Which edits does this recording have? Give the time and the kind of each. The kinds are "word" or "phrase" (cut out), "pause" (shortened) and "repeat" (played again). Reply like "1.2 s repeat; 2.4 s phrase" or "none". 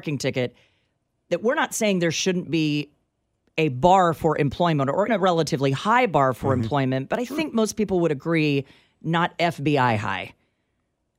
5.1 s word